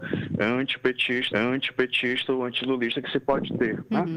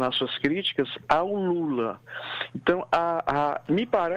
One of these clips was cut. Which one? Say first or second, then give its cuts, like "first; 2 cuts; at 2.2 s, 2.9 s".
first; 1 cut; at 1.3 s